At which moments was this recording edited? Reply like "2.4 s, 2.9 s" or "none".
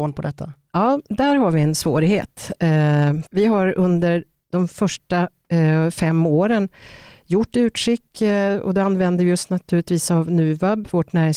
3.3 s